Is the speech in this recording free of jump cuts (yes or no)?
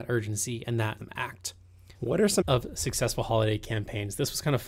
no